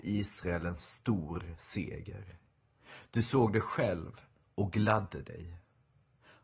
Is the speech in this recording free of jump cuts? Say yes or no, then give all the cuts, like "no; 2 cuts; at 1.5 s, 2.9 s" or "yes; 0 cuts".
yes; 0 cuts